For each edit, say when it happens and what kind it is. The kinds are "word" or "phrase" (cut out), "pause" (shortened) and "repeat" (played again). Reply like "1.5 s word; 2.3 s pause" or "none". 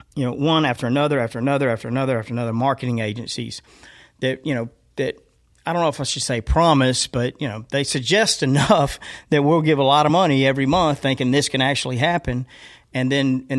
none